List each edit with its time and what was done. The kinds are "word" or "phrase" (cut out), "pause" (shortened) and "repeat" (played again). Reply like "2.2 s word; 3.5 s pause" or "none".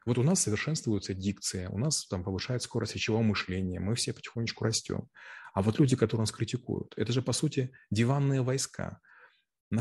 none